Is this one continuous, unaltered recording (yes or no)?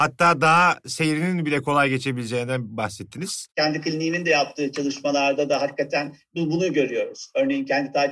yes